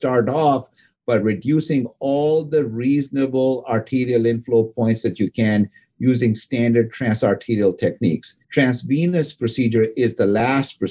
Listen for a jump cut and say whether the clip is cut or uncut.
cut